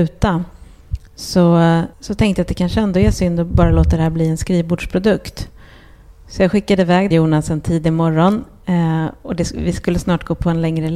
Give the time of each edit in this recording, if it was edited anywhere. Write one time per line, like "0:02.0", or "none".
0:01.9
0:07.1